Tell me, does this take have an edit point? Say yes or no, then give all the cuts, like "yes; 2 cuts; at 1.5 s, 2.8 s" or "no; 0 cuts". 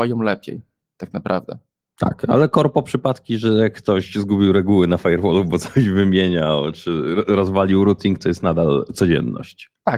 no; 0 cuts